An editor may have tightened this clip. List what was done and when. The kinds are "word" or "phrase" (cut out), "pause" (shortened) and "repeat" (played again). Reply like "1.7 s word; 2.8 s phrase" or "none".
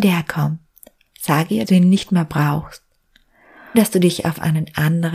1.6 s word; 3.7 s word